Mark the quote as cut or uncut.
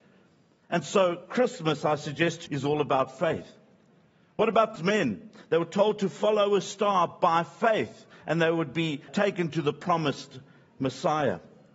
cut